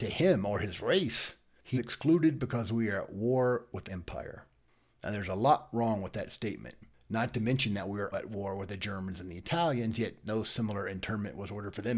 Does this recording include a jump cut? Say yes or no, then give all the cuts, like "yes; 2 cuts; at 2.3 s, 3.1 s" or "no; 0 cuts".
yes; 3 cuts; at 1.8 s, 3.9 s, 8.1 s